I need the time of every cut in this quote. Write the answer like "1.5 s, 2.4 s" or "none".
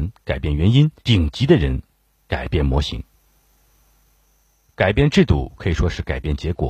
1.0 s